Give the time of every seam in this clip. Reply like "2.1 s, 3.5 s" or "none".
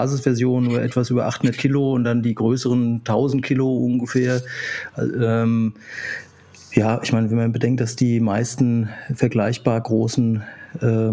none